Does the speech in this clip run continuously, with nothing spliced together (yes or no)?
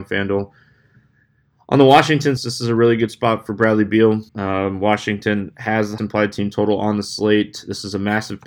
no